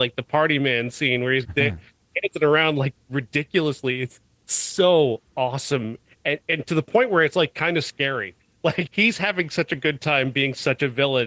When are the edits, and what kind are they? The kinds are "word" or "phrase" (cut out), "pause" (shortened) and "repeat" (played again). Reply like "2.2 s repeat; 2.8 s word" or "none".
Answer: 1.4 s word; 8.9 s word